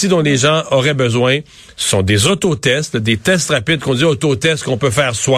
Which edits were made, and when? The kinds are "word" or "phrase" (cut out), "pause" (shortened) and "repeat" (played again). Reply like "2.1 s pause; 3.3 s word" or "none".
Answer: none